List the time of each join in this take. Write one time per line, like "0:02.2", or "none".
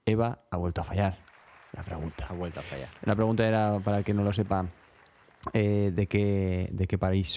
none